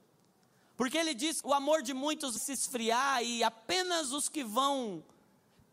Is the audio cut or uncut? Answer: cut